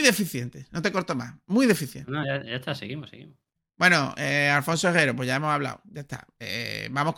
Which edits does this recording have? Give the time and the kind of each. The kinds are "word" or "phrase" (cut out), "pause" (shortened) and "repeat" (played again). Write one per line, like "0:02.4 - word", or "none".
none